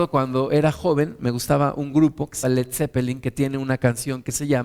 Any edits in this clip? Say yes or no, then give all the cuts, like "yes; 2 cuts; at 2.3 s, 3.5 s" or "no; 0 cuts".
yes; 1 cut; at 2.4 s